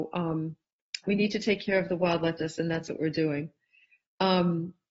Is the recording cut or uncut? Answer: cut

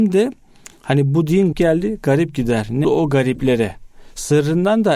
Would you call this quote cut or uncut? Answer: cut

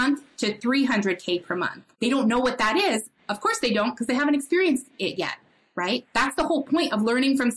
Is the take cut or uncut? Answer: uncut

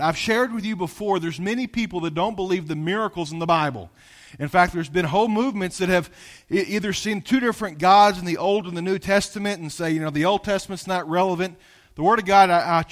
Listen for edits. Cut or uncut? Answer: uncut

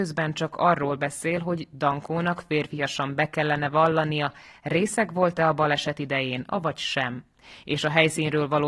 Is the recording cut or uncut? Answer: uncut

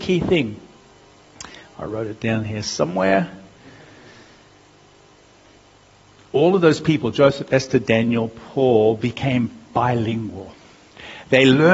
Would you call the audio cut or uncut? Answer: uncut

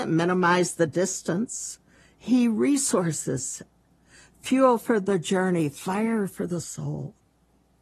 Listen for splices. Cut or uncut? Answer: uncut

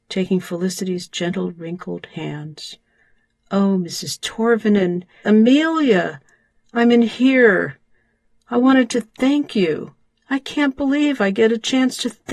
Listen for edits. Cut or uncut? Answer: cut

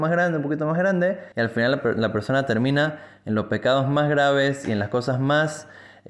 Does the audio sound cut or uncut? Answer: cut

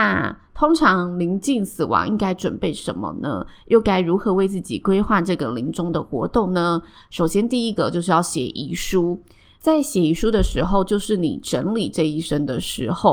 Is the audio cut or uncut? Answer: uncut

